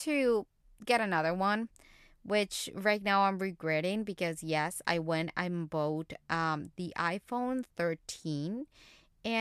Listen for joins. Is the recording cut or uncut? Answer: uncut